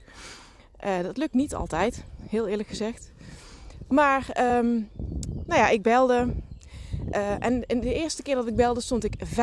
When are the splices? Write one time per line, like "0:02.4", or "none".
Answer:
none